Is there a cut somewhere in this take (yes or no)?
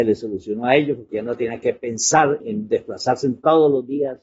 yes